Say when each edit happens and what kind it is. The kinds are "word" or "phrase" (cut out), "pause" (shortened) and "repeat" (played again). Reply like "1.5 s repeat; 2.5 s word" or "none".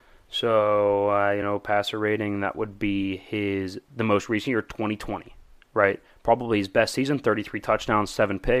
none

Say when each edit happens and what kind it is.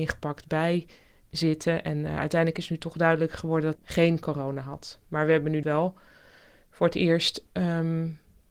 3.7 s word; 5.6 s word

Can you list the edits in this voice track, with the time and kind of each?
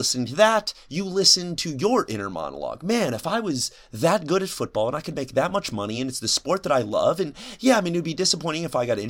none

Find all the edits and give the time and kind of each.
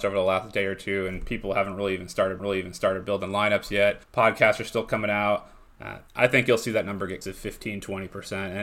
2.4 s repeat; 4.0 s pause; 6.1 s pause; 7.2 s word

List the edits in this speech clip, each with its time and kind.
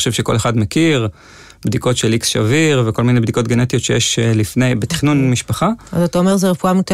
none

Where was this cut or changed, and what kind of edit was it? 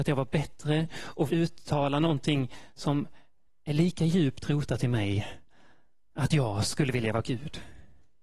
1.3 s word

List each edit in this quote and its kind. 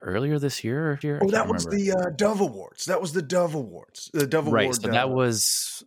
1.0 s phrase

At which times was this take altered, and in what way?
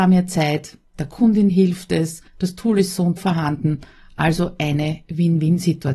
2.3 s pause; 3.2 s word

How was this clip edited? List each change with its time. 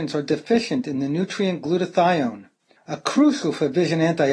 2.8 s pause

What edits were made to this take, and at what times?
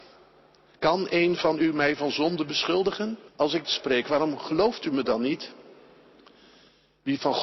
3.3 s pause; 3.6 s phrase

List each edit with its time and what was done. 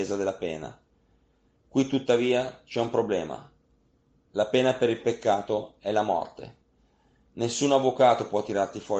none

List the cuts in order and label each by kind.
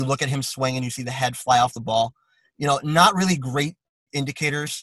none

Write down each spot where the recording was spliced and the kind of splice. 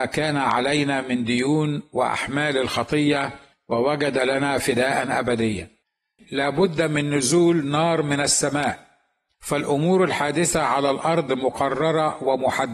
6.2 s word

